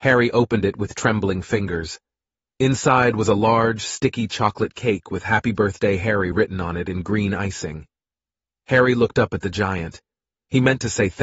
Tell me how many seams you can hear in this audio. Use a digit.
0